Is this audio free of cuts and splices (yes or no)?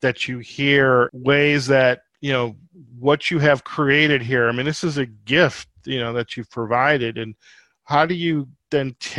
no